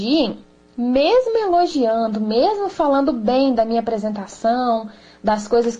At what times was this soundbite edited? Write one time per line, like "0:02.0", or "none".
none

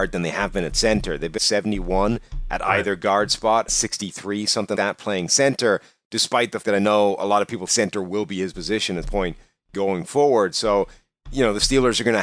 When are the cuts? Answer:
0:01.4
0:03.7
0:04.7
0:06.6
0:07.7
0:08.5
0:09.0

